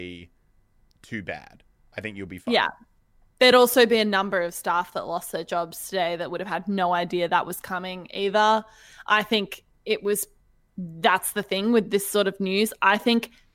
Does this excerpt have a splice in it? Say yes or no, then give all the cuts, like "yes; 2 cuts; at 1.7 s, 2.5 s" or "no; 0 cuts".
no; 0 cuts